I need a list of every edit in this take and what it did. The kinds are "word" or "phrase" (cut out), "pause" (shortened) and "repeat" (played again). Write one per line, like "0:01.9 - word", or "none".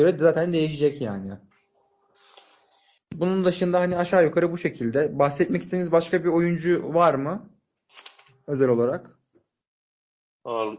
none

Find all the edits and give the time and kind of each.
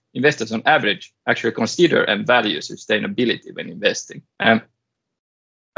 0:01.2 - pause
0:04.3 - pause

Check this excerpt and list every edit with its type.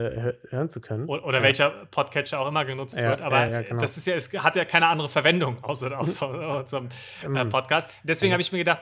none

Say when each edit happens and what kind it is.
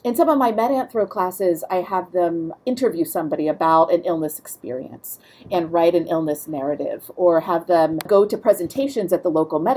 none

